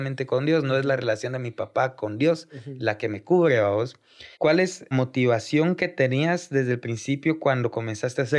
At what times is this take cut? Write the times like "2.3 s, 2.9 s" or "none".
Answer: 4.3 s, 4.9 s